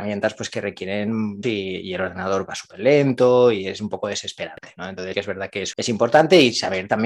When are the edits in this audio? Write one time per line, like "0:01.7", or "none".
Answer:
0:01.4
0:02.5
0:05.1
0:05.7